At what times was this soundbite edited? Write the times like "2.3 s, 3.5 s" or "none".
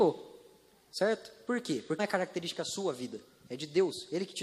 2.0 s